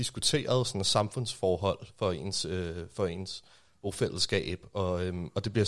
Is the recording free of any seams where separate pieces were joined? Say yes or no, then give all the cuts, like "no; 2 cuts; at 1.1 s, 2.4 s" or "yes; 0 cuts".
yes; 0 cuts